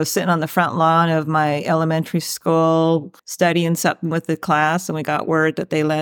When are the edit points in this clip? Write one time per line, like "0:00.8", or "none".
0:03.2